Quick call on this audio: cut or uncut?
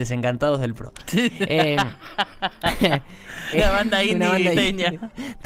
cut